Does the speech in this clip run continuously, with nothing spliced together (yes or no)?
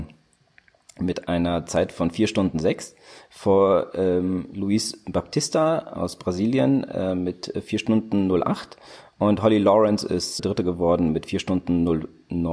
no